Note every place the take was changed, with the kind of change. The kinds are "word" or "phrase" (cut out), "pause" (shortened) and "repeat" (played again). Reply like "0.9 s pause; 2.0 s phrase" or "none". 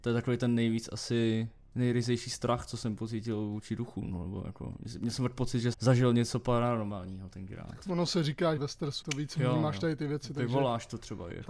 5.7 s word; 8.6 s phrase; 9.0 s word